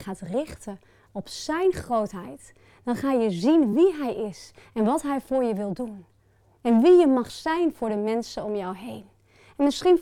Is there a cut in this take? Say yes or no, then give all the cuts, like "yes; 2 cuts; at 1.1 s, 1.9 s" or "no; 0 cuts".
no; 0 cuts